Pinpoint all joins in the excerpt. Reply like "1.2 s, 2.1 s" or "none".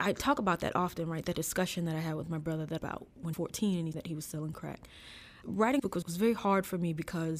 2.8 s, 3.3 s, 3.9 s, 5.8 s